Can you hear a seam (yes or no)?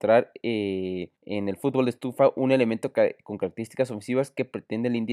yes